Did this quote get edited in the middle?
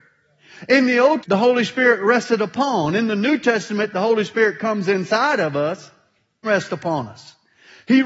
yes; 2 cuts; at 1.2 s, 6.4 s

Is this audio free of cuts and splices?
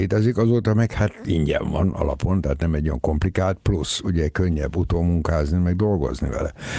yes; 0 cuts

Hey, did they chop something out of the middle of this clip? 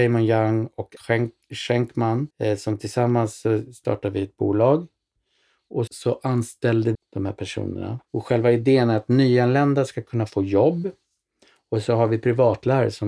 yes; 5 cuts; at 1.0 s, 2.3 s, 5.9 s, 6.9 s, 8.0 s

